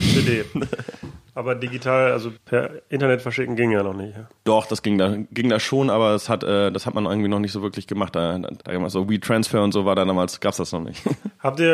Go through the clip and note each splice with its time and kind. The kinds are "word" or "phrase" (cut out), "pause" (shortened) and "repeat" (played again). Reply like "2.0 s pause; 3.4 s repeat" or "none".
2.4 s pause; 4.4 s pause; 8.6 s pause